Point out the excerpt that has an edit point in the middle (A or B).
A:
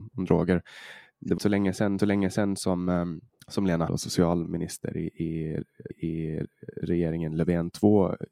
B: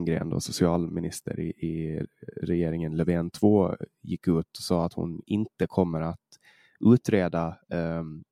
A